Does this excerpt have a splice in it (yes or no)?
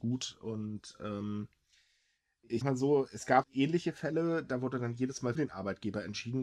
yes